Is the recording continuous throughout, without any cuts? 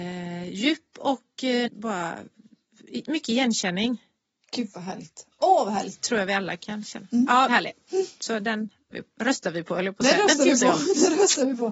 no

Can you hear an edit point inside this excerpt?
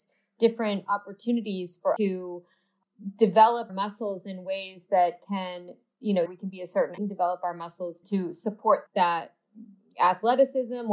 yes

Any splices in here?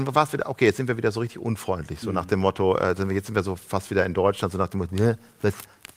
no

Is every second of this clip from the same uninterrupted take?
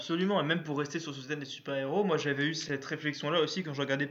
yes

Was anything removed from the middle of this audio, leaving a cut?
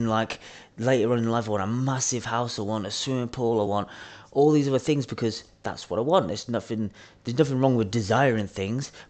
no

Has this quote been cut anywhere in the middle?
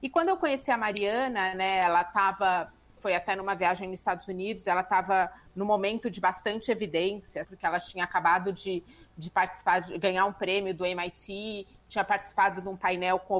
yes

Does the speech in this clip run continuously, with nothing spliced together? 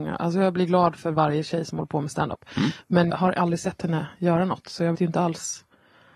no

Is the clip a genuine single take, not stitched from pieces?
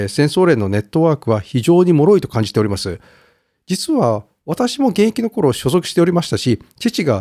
yes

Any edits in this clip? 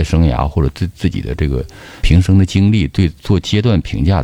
yes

